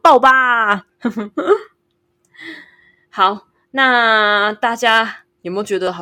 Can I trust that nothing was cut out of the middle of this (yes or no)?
yes